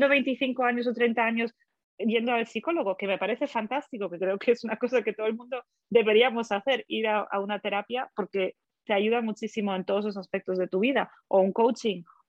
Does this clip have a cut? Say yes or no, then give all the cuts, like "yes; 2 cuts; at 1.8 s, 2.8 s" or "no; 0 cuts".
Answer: no; 0 cuts